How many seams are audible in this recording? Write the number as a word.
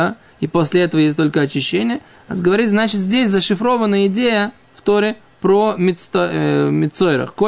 zero